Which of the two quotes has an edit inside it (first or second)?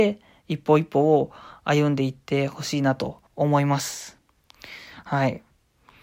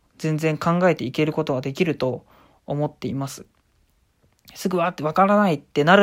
first